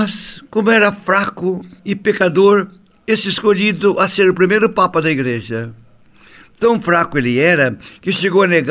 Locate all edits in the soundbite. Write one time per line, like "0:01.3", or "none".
none